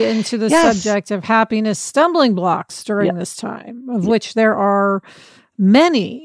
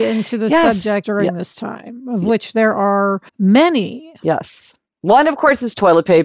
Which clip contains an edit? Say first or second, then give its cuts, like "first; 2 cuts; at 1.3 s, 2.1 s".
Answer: second; 2 cuts; at 1.0 s, 3.3 s